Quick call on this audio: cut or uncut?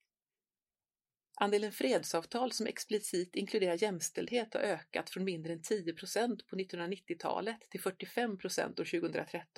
uncut